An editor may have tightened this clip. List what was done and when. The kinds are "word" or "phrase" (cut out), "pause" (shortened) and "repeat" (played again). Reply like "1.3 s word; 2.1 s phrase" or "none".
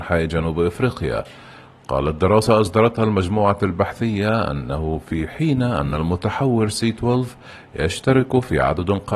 none